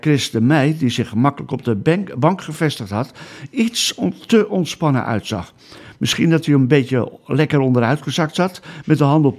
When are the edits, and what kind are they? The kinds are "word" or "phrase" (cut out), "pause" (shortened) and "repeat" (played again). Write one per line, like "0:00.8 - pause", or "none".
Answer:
none